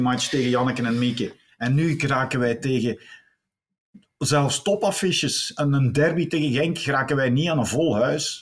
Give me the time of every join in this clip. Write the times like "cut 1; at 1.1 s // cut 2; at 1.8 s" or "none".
none